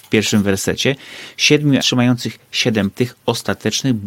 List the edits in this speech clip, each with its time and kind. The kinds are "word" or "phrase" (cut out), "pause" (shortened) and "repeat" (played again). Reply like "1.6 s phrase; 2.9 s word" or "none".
1.8 s word; 2.9 s word